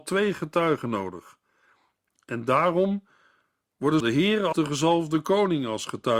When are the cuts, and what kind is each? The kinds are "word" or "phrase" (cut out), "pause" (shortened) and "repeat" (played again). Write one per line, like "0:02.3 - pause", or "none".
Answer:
0:04.0 - word
0:04.5 - word